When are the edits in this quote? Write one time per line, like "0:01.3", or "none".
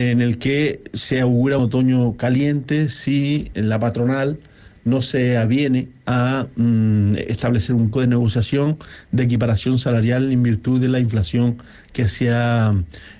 0:01.6
0:03.5
0:07.9